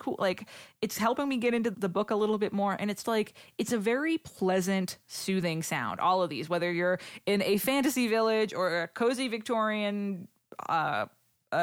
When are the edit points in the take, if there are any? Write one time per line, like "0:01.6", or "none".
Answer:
0:01.7
0:03.0